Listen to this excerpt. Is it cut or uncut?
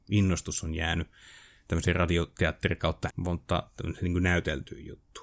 cut